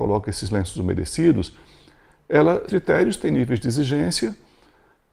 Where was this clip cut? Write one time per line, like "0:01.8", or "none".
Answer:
0:02.7